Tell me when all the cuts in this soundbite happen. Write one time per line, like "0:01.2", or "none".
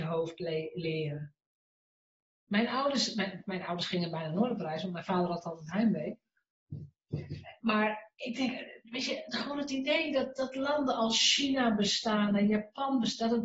none